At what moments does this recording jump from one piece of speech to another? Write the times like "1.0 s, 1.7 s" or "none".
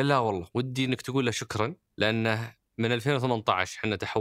1.8 s